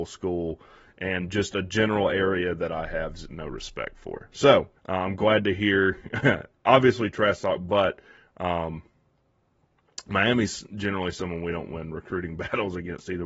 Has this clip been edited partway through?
yes; 2 cuts; at 3.3 s, 4.8 s

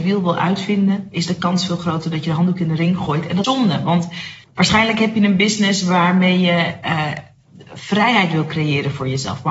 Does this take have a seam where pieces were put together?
yes; 2 cuts; at 3.4 s, 4.4 s

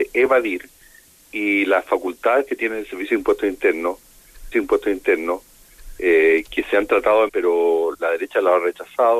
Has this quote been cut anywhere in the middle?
yes; 3 cuts; at 4.5 s, 7.3 s, 7.9 s

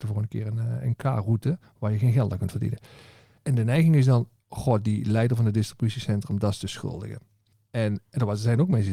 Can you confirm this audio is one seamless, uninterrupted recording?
no; 1 cut; at 1.6 s

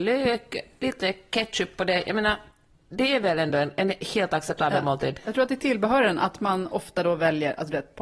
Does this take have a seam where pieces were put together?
no; 0 cuts

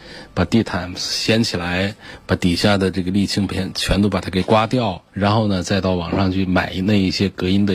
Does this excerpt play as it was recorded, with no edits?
no; 1 cut; at 5.1 s

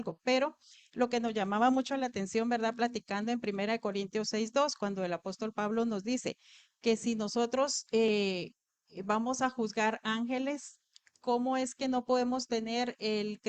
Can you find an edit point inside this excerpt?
no; 0 cuts

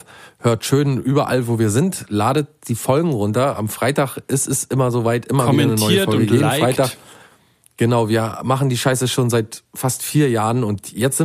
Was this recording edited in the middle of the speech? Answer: no; 0 cuts

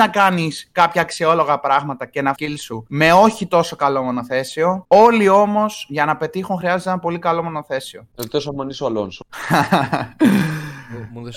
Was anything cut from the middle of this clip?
yes; 1 cut; at 2.4 s

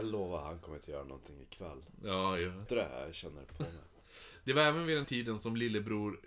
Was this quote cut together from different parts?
yes; 2 cuts; at 2.7 s, 5.0 s

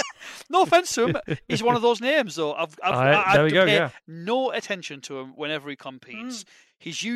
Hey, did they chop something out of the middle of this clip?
no; 0 cuts

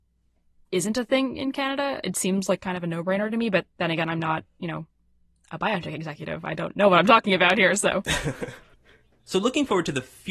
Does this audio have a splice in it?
no; 0 cuts

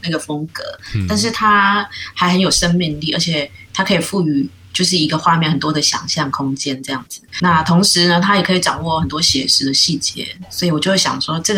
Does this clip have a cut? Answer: yes; 1 cut; at 7.4 s

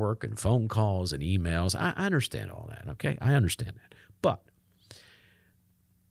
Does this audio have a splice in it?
no; 0 cuts

